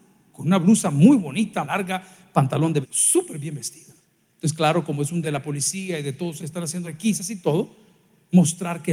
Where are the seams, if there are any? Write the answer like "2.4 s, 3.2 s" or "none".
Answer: 1.6 s, 2.8 s, 4.0 s, 5.2 s, 6.4 s, 6.8 s